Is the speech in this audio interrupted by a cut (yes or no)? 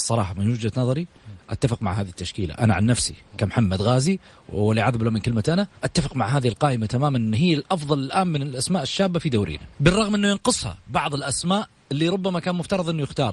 yes